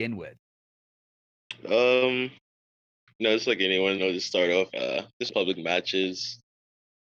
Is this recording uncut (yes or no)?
no